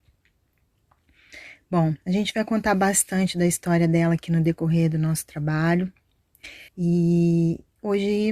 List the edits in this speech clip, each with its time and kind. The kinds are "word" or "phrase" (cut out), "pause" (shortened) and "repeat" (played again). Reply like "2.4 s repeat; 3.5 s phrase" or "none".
6.7 s pause